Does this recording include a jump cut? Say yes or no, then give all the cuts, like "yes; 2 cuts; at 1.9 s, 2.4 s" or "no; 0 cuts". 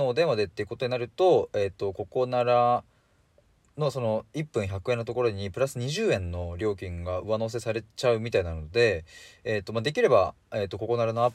no; 0 cuts